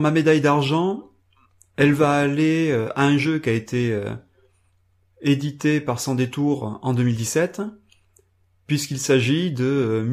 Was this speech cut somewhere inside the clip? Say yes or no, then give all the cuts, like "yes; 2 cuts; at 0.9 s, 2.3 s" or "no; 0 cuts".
no; 0 cuts